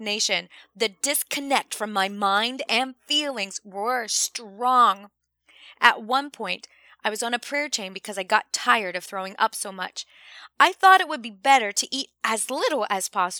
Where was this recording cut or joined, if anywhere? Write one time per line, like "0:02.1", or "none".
none